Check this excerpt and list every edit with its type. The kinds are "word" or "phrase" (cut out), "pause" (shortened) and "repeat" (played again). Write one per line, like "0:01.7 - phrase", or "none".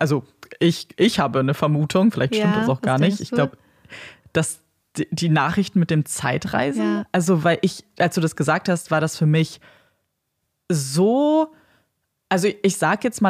none